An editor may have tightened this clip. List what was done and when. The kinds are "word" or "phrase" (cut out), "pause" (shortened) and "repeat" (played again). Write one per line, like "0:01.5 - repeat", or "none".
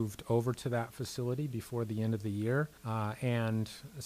0:02.8 - pause